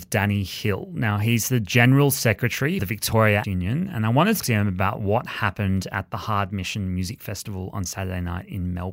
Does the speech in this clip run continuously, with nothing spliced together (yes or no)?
no